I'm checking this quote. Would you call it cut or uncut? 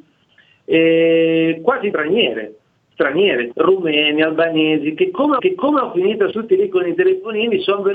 cut